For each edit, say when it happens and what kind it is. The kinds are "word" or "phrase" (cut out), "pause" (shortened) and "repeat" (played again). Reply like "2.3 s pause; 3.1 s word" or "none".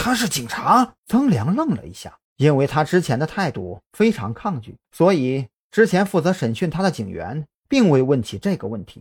1.0 s pause; 2.2 s pause; 4.8 s pause